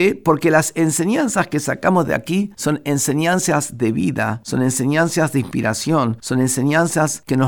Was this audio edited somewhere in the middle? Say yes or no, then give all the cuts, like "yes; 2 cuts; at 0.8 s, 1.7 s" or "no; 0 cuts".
no; 0 cuts